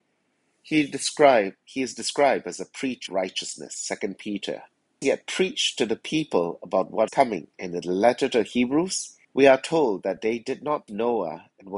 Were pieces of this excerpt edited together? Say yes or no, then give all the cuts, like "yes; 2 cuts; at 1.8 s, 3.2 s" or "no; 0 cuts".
yes; 6 cuts; at 3.1 s, 5.0 s, 7.1 s, 7.5 s, 9.2 s, 10.9 s